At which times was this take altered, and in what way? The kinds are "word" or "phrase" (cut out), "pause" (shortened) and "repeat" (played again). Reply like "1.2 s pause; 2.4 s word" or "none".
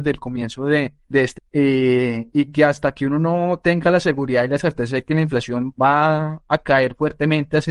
1.0 s pause; 1.4 s word